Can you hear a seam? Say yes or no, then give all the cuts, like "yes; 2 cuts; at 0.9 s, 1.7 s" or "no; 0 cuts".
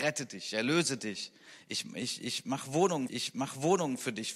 yes; 1 cut; at 3.1 s